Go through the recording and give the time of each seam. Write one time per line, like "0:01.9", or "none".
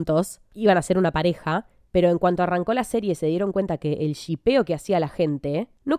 none